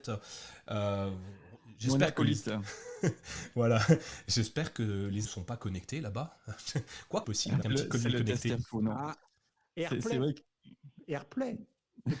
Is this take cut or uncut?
cut